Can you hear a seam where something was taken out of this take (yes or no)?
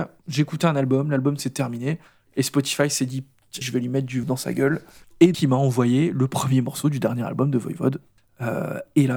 yes